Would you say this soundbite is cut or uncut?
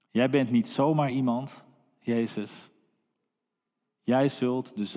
uncut